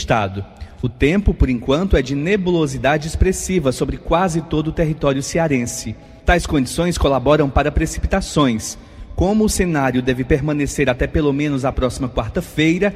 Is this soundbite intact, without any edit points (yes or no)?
yes